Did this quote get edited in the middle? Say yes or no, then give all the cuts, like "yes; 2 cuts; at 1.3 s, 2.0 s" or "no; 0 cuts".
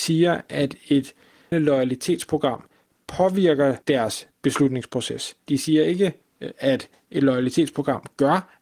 yes; 3 cuts; at 1.5 s, 3.8 s, 5.4 s